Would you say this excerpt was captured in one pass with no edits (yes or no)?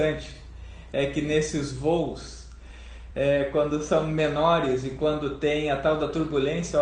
yes